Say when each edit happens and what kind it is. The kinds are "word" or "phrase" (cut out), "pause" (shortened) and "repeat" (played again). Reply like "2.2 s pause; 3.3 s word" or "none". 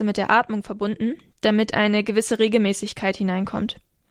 none